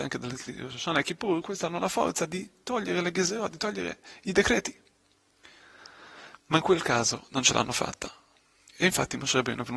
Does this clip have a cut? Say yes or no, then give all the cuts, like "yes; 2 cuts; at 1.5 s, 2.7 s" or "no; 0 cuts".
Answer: no; 0 cuts